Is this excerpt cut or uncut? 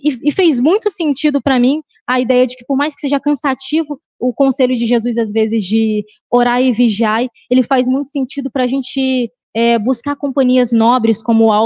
uncut